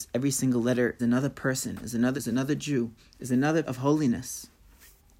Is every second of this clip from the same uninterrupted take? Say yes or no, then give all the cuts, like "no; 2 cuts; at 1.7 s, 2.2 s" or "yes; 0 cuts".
no; 4 cuts; at 1.0 s, 2.2 s, 3.0 s, 3.6 s